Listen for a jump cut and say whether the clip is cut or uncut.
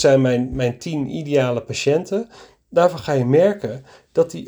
uncut